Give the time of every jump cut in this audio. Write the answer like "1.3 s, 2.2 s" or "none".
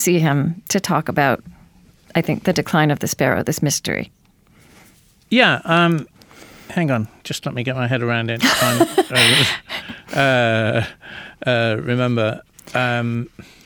none